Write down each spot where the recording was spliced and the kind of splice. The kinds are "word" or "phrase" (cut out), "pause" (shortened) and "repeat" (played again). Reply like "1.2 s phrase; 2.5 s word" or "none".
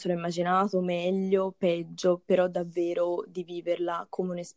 none